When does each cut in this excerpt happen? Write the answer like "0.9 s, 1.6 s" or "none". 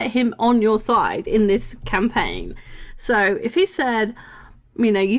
none